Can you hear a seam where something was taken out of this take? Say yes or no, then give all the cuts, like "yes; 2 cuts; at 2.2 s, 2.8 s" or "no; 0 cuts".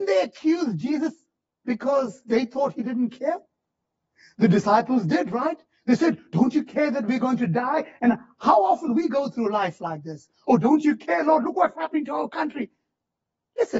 no; 0 cuts